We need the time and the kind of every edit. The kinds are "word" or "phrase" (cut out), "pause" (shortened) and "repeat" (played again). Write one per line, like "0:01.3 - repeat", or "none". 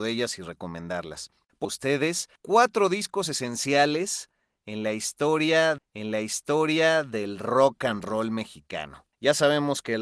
0:01.6 - phrase
0:02.4 - pause
0:05.8 - repeat